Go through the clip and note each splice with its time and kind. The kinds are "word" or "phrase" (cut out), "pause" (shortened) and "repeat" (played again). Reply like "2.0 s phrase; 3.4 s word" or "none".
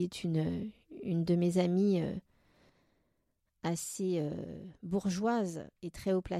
none